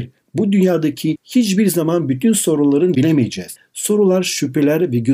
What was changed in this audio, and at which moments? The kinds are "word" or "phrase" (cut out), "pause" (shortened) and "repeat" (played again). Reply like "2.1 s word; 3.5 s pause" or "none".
2.9 s word